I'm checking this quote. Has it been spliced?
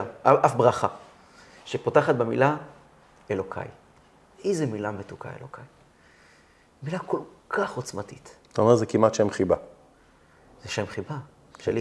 no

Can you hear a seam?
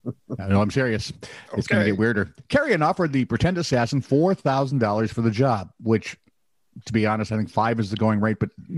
no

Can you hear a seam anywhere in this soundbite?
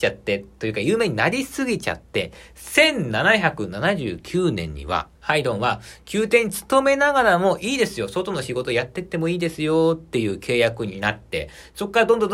yes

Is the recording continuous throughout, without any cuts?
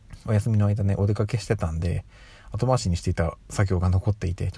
yes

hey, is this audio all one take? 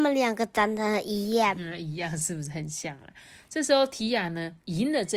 yes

